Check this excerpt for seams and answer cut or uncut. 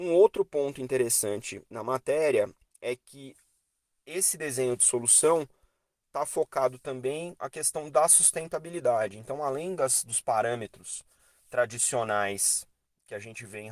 cut